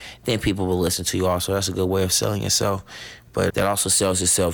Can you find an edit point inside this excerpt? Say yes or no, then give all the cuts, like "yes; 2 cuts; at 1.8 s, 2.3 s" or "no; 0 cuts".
yes; 1 cut; at 3.5 s